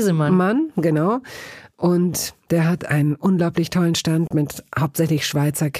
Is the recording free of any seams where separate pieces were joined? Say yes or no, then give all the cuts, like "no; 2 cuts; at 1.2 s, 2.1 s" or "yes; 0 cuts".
yes; 0 cuts